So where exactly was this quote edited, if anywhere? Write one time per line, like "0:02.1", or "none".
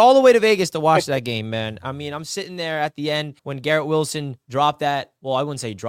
0:03.4